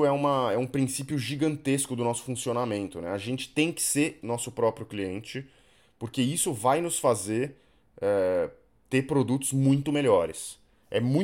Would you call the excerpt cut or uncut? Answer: uncut